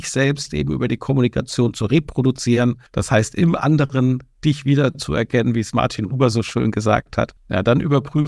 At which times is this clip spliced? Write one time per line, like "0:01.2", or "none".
0:02.9
0:07.4

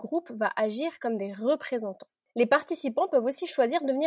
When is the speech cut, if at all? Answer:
none

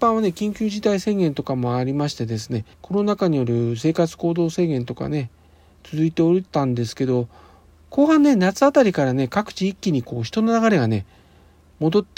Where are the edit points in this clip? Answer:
0:02.7
0:06.5

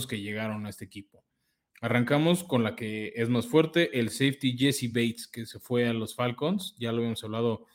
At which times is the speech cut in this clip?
none

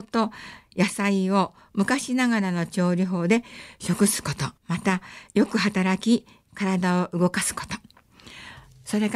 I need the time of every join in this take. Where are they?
0:04.6

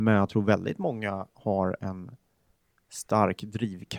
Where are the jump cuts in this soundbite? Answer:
none

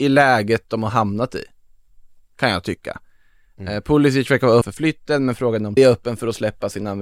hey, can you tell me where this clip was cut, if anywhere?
0:04.6
0:05.8

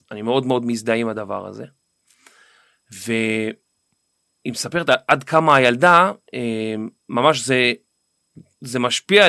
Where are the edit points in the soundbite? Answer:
0:07.0

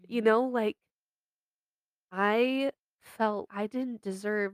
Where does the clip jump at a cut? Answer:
0:03.5

